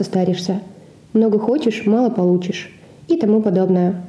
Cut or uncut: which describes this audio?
uncut